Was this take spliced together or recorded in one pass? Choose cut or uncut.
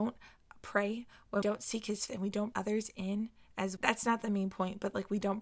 cut